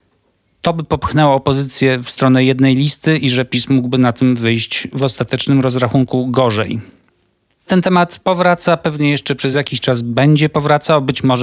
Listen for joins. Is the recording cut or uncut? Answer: uncut